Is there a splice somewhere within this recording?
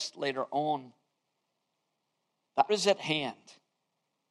yes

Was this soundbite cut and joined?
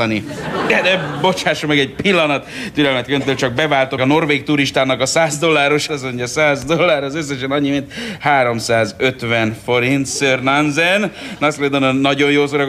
yes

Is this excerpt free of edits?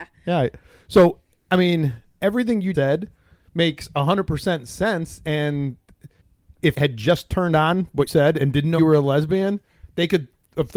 no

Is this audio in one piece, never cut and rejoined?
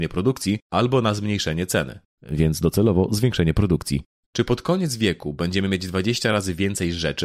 yes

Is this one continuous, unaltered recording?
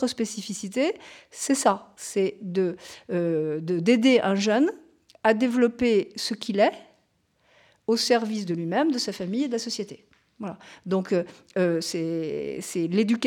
yes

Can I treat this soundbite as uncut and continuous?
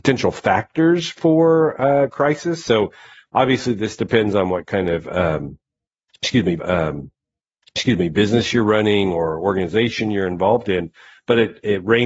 no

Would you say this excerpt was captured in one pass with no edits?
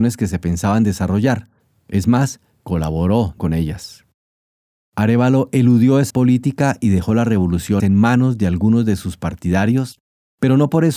no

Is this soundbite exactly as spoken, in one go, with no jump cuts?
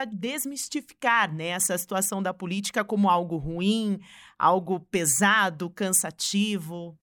yes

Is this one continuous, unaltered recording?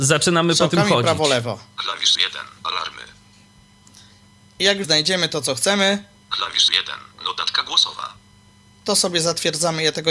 no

